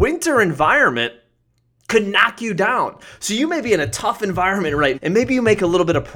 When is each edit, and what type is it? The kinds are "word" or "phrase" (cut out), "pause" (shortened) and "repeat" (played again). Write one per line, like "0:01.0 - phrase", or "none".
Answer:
0:04.9 - word